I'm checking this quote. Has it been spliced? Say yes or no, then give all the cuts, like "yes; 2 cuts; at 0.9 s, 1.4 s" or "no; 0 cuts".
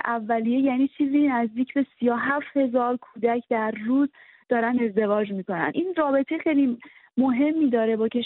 no; 0 cuts